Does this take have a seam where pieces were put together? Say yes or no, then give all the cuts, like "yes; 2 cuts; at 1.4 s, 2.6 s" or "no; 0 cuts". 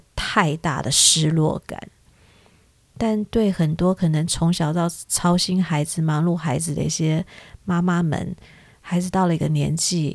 no; 0 cuts